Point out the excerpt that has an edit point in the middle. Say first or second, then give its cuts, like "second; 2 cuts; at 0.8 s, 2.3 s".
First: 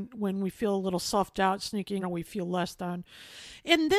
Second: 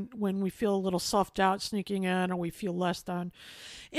first; 1 cut; at 2.0 s